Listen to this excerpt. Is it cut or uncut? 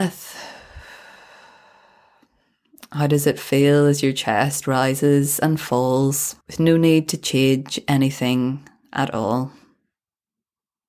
cut